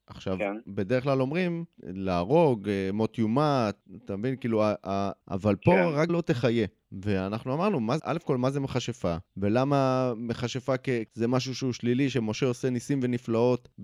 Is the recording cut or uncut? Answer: cut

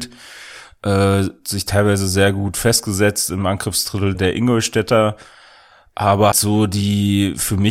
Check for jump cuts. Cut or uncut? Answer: cut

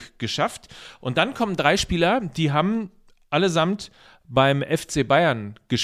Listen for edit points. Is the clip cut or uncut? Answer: uncut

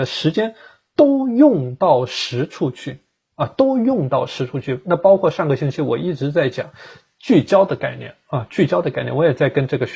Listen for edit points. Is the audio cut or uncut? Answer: uncut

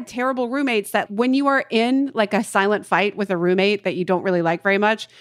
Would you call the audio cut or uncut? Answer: cut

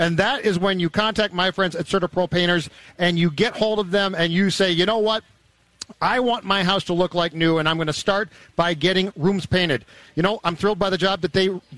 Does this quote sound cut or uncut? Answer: uncut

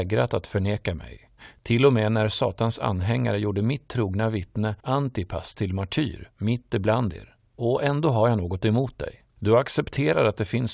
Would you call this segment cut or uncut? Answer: cut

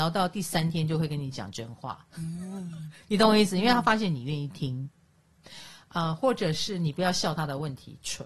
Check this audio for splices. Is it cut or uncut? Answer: uncut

